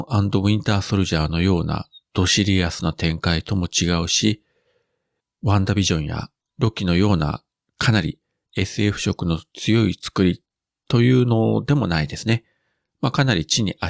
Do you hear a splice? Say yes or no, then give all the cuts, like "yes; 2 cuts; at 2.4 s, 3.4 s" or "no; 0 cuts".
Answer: no; 0 cuts